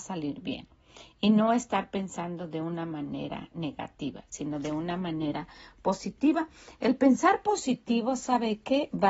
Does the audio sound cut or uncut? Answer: uncut